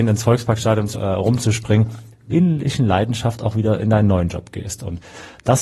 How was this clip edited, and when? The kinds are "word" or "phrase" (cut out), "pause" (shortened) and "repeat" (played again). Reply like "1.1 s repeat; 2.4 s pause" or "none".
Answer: 0.9 s phrase; 2.3 s word